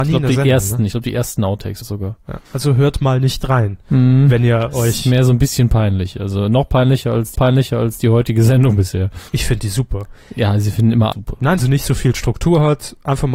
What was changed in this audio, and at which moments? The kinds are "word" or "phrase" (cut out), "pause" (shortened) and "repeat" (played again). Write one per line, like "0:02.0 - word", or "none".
0:01.8 - word
0:02.5 - pause
0:07.3 - repeat
0:09.3 - pause
0:11.1 - word
0:11.6 - phrase